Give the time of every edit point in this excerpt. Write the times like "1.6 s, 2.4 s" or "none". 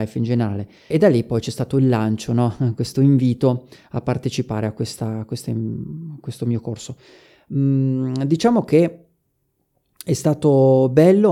0.9 s

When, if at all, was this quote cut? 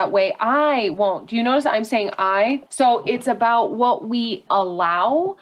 2.7 s, 4.5 s

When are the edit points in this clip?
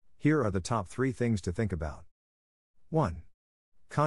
none

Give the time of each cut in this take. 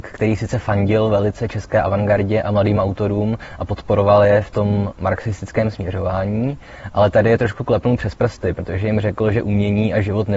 none

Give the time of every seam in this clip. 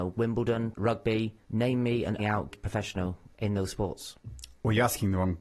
1.4 s, 2.2 s, 2.5 s

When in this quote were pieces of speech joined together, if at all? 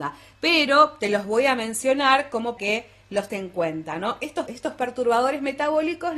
2.6 s, 3.3 s, 4.5 s

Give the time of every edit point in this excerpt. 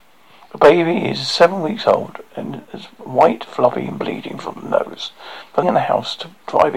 5.6 s

